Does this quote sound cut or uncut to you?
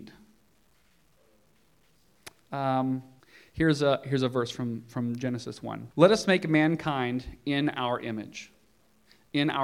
cut